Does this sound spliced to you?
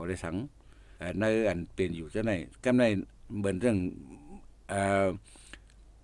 yes; 1 cut; at 1.0 s

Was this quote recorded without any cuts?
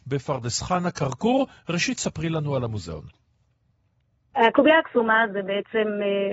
yes; 0 cuts

